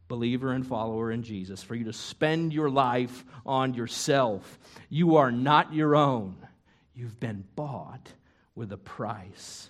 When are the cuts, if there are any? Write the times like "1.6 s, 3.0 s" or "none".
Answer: none

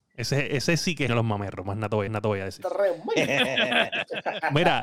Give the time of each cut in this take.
1.1 s, 2.1 s

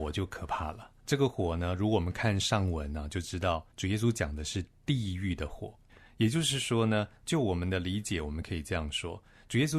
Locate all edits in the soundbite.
1.0 s, 3.7 s, 5.9 s

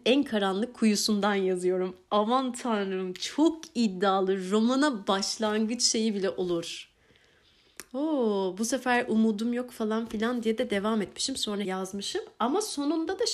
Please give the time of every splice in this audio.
11.6 s

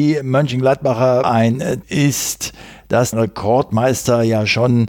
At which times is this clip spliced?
1.2 s, 1.8 s, 3.1 s

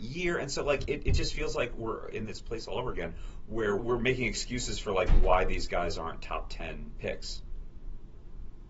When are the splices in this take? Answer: 3.8 s

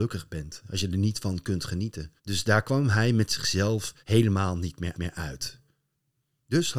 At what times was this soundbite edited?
2.2 s, 4.0 s, 4.9 s

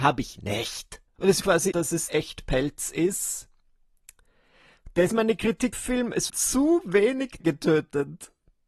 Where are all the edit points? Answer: 1.1 s, 1.4 s, 1.7 s, 2.1 s, 5.1 s, 5.7 s, 6.3 s, 7.4 s

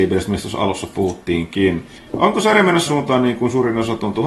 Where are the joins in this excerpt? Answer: 2.0 s, 2.9 s

